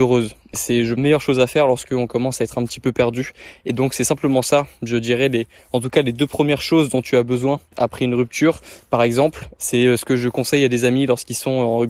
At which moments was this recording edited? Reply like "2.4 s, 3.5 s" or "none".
1.0 s, 9.6 s